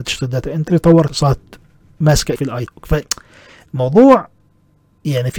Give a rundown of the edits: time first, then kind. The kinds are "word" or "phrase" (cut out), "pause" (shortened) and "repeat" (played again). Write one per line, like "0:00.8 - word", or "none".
0:01.1 - word
0:02.4 - word
0:02.7 - word